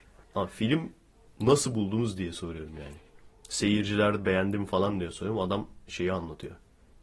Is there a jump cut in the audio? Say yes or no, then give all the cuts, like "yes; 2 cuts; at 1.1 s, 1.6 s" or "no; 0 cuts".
no; 0 cuts